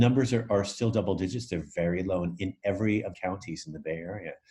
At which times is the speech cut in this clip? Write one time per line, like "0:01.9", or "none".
0:03.1